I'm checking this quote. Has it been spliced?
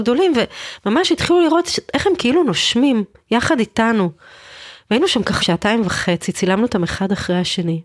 yes; 1 cut; at 5.4 s

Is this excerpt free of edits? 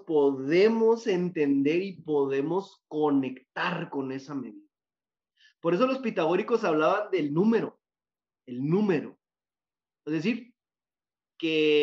yes; 0 cuts

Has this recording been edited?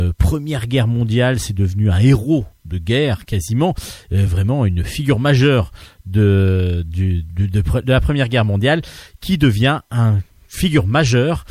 no; 0 cuts

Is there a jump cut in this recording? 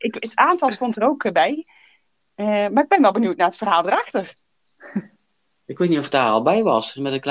no; 0 cuts

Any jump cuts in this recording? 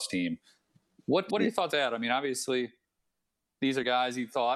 yes; 2 cuts; at 1.3 s, 1.7 s

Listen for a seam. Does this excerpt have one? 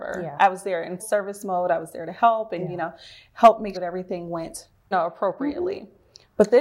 yes; 3 cuts; at 1.0 s, 3.7 s, 4.9 s

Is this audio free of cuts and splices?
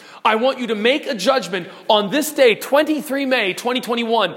yes; 0 cuts

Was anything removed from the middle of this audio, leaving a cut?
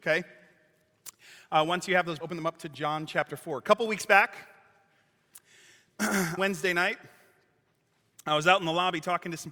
yes; 2 cuts; at 2.2 s, 6.4 s

